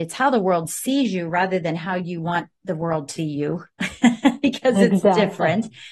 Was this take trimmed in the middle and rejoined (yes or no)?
yes